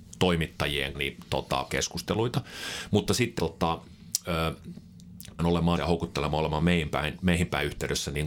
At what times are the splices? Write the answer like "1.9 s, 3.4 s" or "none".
0.9 s, 1.7 s, 3.4 s, 5.4 s, 5.8 s